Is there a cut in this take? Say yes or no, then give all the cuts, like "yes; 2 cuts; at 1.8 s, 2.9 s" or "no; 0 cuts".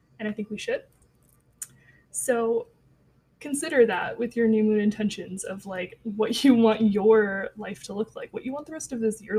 no; 0 cuts